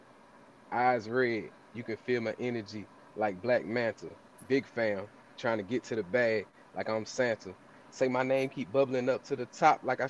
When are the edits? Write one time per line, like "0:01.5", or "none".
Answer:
none